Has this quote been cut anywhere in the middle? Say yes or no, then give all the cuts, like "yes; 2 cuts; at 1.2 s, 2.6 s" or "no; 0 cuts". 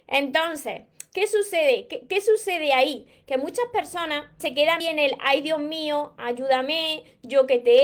yes; 2 cuts; at 4.4 s, 4.8 s